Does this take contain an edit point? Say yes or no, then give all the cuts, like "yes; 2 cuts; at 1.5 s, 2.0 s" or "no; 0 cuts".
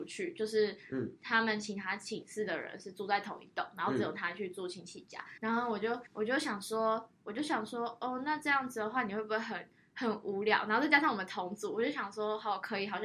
yes; 2 cuts; at 5.4 s, 6.1 s